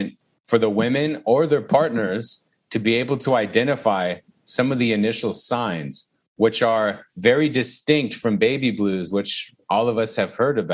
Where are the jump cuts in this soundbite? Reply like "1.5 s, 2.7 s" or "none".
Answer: none

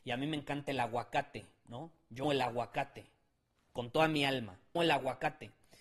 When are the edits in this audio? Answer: 2.2 s, 4.8 s

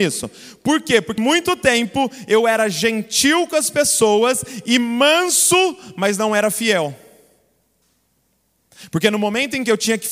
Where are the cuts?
1.2 s

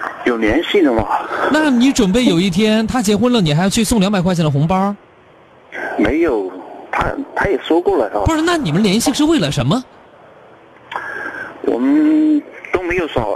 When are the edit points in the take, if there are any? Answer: none

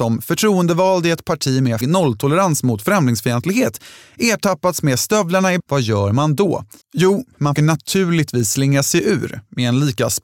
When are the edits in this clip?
1.8 s, 5.6 s, 6.8 s, 7.6 s

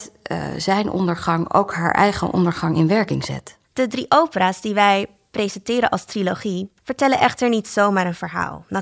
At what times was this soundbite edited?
3.6 s, 6.8 s

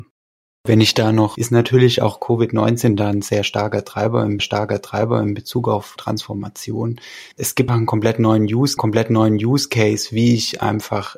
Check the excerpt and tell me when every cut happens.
1.3 s, 4.4 s, 6.0 s, 7.3 s, 7.7 s, 8.8 s

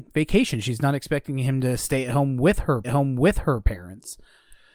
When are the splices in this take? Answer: 2.8 s

